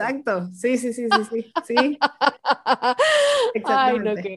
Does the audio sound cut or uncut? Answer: uncut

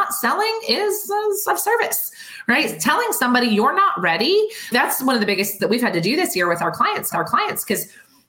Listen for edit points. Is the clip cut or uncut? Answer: cut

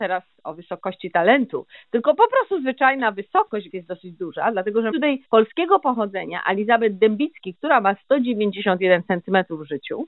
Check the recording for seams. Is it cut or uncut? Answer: cut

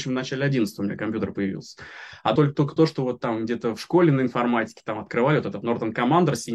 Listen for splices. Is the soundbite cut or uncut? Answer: cut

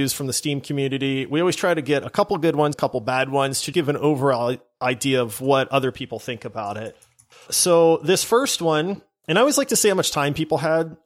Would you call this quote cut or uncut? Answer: cut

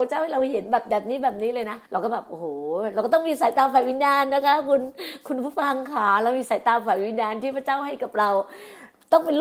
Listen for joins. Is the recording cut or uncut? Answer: cut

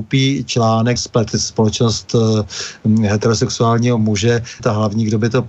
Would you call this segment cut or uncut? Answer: cut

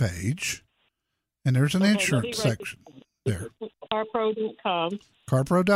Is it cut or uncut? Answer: uncut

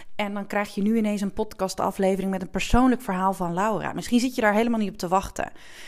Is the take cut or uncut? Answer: uncut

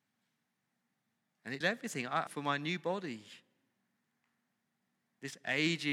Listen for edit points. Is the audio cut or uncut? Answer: cut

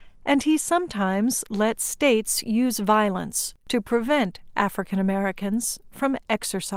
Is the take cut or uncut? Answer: cut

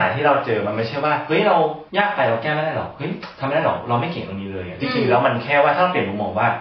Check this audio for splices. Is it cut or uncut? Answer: cut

